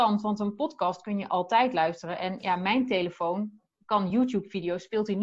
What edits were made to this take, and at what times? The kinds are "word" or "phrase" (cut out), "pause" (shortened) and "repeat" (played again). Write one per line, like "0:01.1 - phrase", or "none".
none